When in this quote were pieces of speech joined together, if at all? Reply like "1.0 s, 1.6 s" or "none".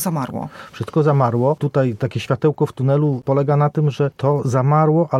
none